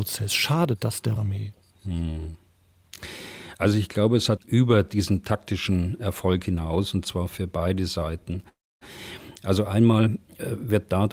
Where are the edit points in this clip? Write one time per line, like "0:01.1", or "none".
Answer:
0:01.2
0:04.4